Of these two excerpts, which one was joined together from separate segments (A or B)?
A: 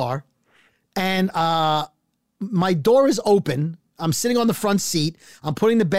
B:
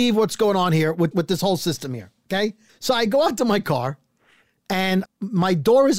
B